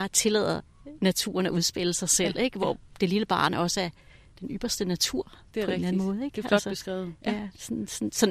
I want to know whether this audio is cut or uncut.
uncut